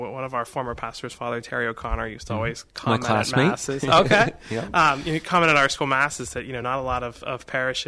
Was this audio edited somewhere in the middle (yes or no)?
no